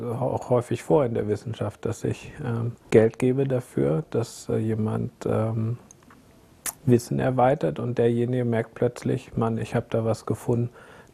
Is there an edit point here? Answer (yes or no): yes